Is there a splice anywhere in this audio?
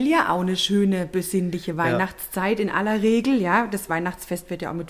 no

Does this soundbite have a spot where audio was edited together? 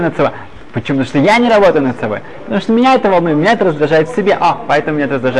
no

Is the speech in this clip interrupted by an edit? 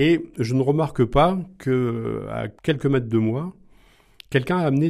yes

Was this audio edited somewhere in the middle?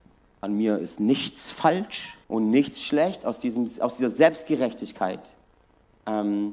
yes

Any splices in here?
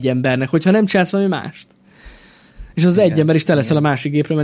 no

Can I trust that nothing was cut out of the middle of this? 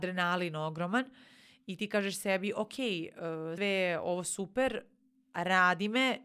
no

